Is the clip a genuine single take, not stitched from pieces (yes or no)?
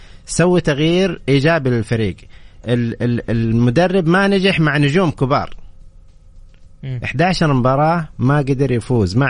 yes